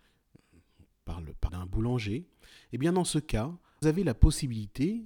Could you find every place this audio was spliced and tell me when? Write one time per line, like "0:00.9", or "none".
0:01.5
0:03.8